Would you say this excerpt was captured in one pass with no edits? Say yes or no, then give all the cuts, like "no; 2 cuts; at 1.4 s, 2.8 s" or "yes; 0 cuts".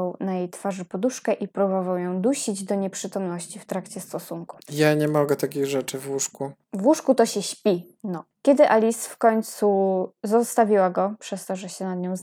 no; 1 cut; at 4.6 s